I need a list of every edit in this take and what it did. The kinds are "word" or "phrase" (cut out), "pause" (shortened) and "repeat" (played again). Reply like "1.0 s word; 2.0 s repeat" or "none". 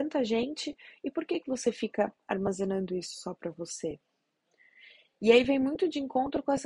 none